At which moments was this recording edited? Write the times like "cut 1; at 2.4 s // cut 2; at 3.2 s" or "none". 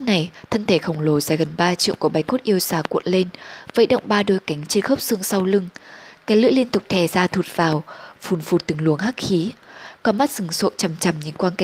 none